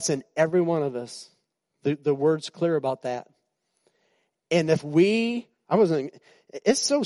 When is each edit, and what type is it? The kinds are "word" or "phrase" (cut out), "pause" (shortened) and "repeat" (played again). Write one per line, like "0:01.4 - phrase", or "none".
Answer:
0:05.6 - word